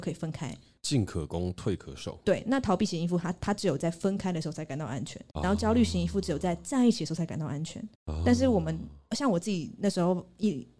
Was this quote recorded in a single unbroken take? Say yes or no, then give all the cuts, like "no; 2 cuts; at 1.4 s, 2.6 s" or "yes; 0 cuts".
no; 2 cuts; at 5.3 s, 7.9 s